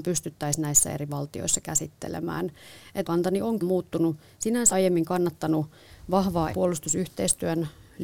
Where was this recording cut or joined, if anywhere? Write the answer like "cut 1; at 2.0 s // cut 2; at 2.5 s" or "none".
cut 1; at 3.0 s // cut 2; at 3.6 s // cut 3; at 4.7 s // cut 4; at 6.5 s